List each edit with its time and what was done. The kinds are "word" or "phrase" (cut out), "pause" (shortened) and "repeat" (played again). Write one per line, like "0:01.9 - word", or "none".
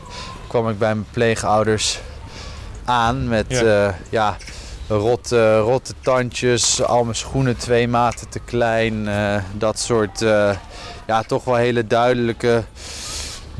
none